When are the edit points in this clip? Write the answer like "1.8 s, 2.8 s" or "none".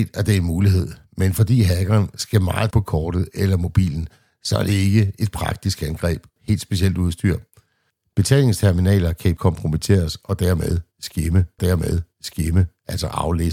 2.7 s, 6.4 s, 9.4 s, 11.6 s